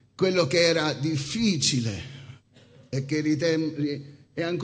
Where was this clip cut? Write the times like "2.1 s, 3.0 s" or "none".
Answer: 2.5 s